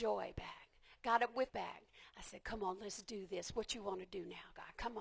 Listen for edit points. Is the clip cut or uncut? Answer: cut